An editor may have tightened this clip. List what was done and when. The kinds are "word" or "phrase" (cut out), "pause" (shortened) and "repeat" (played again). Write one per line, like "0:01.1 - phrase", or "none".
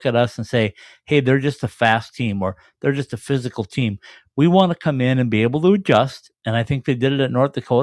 none